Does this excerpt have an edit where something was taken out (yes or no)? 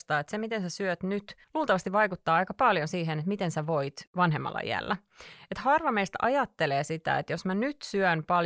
yes